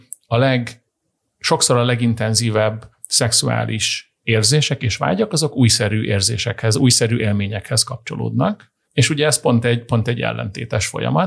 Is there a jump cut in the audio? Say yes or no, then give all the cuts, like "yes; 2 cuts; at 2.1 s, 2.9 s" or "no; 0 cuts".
yes; 1 cut; at 8.8 s